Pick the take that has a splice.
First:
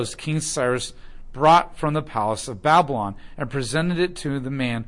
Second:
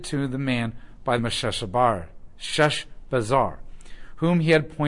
second; 1 cut; at 1.2 s

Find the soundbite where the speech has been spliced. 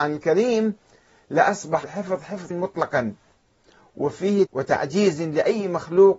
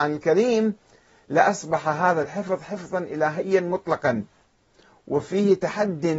first; 3 cuts; at 1.8 s, 2.5 s, 4.5 s

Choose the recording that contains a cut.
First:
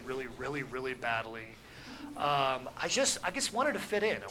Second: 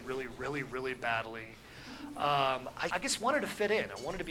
second; 1 cut; at 2.9 s

